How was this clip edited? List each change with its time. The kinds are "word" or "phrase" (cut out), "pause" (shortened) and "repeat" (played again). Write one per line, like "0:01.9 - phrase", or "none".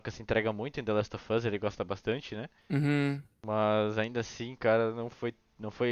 0:02.6 - pause